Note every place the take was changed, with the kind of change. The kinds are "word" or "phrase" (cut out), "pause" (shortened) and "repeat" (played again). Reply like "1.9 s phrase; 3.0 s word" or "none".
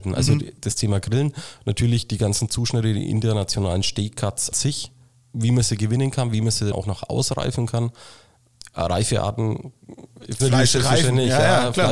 4.5 s word; 6.7 s word; 10.4 s word